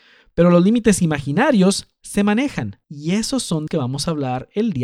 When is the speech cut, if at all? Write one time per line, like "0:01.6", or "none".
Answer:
0:02.8
0:03.7